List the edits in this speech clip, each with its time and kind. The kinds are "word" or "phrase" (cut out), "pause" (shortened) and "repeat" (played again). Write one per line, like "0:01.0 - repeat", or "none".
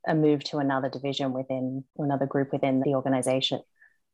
0:01.9 - pause
0:02.8 - word